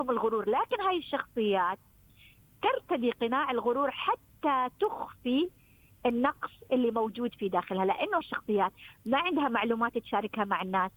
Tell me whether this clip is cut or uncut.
cut